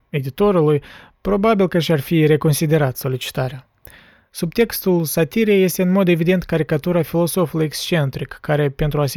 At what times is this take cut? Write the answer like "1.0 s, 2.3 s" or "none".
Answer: none